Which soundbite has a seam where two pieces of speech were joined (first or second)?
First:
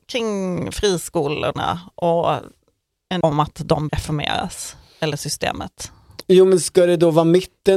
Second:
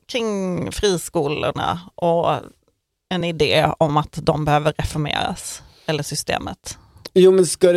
first